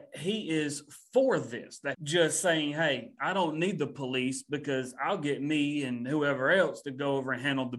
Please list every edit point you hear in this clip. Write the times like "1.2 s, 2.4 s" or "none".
1.9 s

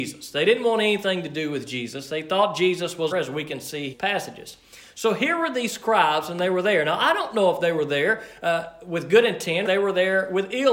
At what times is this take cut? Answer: 3.1 s, 3.9 s, 9.7 s

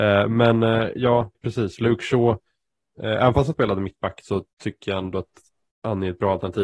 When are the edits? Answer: 1.3 s, 4.5 s

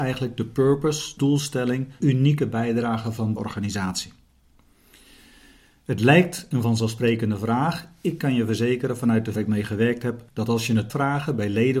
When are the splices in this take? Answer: 1.2 s, 2.0 s, 3.4 s, 9.4 s, 10.3 s, 10.9 s

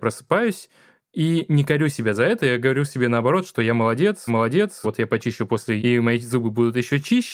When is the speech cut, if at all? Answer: 4.3 s, 5.8 s

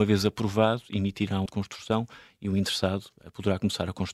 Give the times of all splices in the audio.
1.5 s

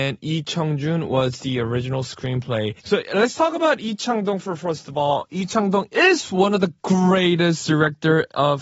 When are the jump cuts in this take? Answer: 2.8 s

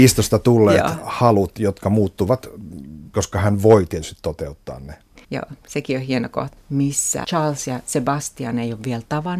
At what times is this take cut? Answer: 3.1 s, 5.2 s, 6.6 s, 7.2 s

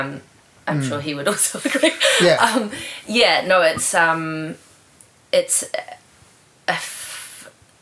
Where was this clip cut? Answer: none

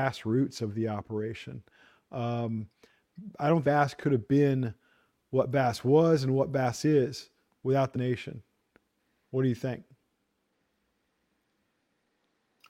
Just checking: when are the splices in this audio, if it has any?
3.6 s, 7.9 s

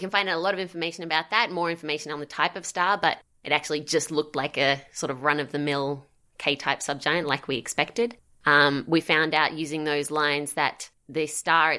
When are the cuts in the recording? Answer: none

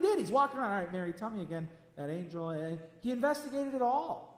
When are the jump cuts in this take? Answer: none

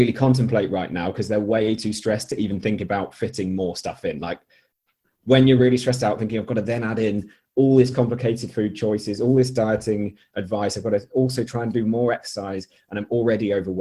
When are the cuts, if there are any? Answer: none

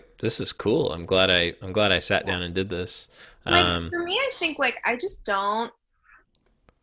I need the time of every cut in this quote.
3.2 s

